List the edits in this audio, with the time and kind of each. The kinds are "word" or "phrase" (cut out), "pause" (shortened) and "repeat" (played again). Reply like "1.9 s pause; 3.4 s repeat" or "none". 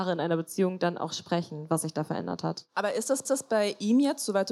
3.2 s repeat